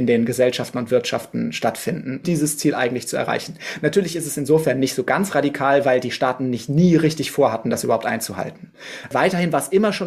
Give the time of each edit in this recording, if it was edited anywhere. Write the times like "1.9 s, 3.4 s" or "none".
2.2 s